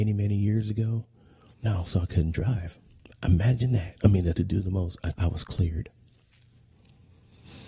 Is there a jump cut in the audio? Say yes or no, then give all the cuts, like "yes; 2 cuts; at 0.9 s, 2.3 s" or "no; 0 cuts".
yes; 5 cuts; at 1.6 s, 3.0 s, 4.0 s, 4.4 s, 5.1 s